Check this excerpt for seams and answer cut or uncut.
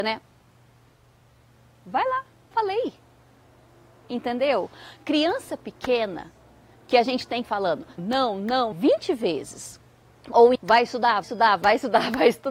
cut